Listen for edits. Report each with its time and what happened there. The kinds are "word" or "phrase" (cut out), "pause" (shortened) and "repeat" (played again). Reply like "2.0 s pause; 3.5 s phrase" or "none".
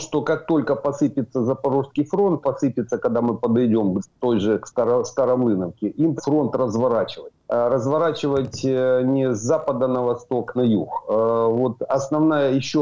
2.4 s word; 4.0 s word; 6.2 s word; 7.4 s pause; 10.6 s phrase

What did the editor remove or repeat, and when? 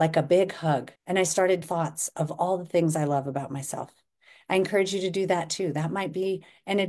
1.0 s pause; 1.6 s phrase

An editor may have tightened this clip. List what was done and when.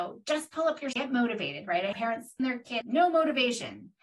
0.9 s word; 1.9 s word; 2.4 s word; 2.8 s word

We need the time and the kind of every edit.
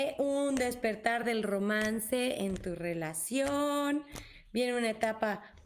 none

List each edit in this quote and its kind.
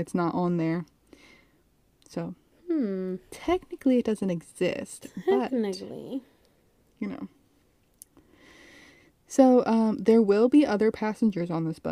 none

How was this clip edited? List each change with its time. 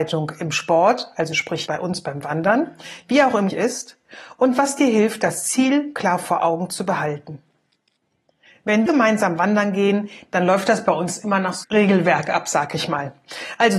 1.7 s word; 3.5 s word; 8.9 s word; 11.6 s word

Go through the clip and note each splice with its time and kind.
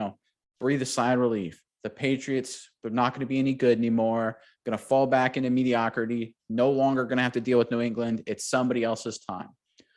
none

